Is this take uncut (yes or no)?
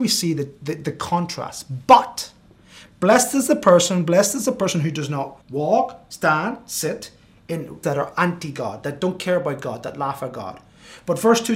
no